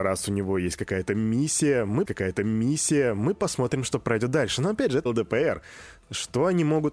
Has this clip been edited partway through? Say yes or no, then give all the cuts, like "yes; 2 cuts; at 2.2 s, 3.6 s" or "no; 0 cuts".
yes; 2 cuts; at 2.1 s, 5.1 s